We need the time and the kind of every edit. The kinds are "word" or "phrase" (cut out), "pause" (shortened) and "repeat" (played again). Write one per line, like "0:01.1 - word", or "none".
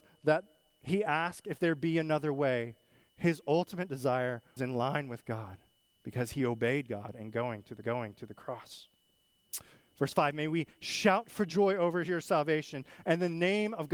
0:04.6 - word
0:07.8 - repeat